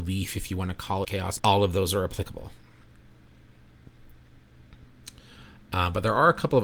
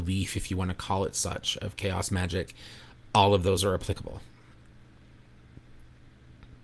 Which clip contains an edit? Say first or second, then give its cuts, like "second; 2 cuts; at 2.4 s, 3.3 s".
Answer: first; 2 cuts; at 1.0 s, 1.4 s